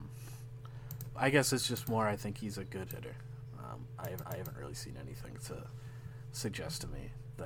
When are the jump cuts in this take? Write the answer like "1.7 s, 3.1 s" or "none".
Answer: 1.2 s, 2.9 s, 4.2 s